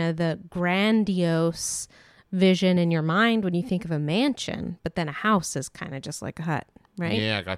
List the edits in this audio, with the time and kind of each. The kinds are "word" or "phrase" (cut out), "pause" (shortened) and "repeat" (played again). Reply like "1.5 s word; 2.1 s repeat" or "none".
none